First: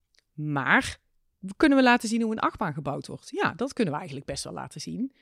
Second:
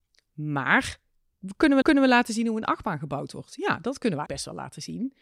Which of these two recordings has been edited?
second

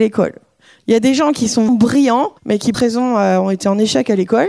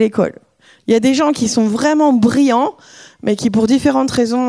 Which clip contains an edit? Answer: first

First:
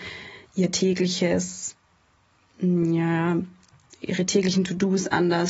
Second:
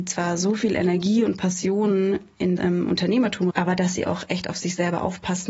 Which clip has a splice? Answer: second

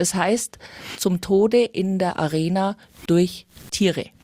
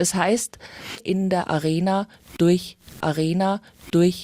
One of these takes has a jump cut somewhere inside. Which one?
second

